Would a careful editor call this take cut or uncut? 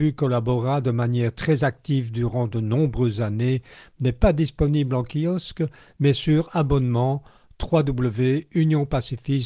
uncut